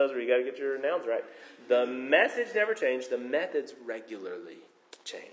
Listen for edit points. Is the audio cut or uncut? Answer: uncut